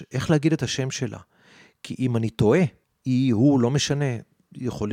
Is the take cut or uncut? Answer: uncut